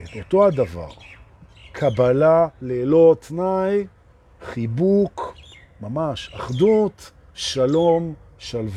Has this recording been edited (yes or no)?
no